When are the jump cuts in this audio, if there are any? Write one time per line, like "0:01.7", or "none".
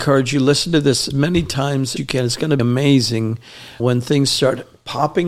0:01.1
0:02.0
0:02.6
0:03.8